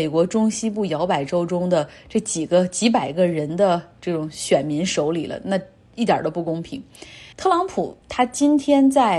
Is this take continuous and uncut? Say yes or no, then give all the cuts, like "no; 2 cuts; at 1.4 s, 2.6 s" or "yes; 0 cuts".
no; 2 cuts; at 7.3 s, 8.0 s